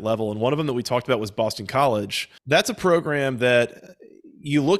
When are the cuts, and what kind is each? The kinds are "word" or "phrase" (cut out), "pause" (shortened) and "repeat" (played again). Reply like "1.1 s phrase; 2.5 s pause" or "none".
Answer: 2.4 s pause